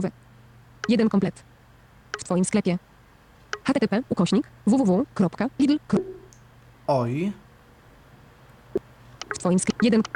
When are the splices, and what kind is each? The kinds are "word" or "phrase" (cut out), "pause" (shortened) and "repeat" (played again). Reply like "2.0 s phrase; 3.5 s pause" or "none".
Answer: 4.1 s word